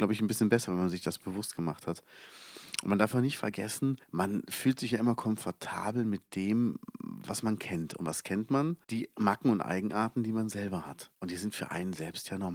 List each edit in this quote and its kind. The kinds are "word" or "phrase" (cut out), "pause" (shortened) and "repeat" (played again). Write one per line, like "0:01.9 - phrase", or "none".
0:04.0 - pause
0:08.8 - pause
0:11.2 - pause